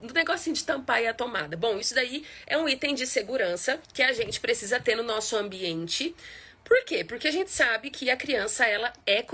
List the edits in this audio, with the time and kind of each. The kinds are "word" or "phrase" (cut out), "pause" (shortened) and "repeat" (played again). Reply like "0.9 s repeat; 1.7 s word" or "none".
3.8 s pause